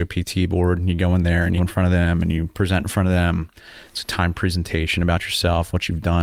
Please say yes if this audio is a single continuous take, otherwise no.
no